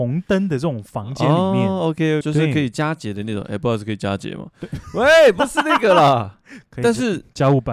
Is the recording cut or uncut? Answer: cut